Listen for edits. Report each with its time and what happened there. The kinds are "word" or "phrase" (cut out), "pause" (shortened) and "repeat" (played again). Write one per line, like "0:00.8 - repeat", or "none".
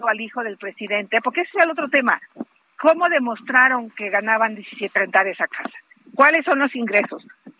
0:05.0 - phrase